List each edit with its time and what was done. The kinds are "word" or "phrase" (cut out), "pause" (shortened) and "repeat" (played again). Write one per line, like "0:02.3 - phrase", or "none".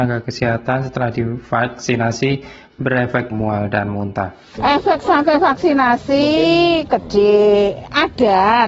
0:03.3 - word